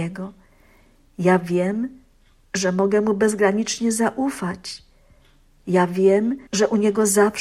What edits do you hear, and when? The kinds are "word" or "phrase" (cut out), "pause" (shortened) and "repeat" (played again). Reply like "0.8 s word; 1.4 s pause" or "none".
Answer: 6.5 s pause